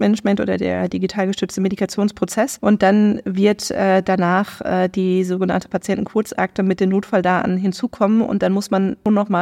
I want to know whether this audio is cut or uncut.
uncut